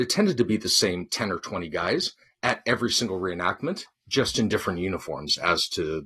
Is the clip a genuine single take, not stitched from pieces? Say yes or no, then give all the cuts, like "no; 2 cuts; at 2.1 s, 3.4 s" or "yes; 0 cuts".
yes; 0 cuts